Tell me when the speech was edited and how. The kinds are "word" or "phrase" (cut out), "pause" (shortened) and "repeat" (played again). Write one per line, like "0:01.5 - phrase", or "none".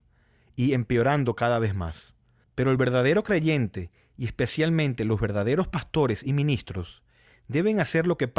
none